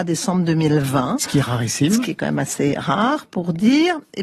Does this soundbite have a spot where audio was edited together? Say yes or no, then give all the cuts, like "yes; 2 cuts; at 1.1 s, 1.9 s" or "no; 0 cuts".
no; 0 cuts